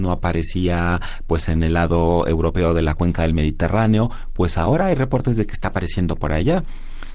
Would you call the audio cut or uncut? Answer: uncut